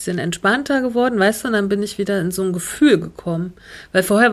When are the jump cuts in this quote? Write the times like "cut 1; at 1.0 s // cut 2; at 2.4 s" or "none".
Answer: none